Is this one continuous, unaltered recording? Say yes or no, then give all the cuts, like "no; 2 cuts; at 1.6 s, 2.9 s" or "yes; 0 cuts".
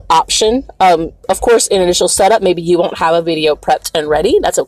yes; 0 cuts